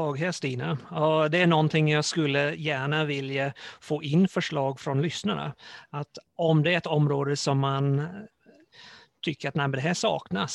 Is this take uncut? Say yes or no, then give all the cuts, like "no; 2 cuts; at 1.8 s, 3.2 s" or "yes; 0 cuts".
yes; 0 cuts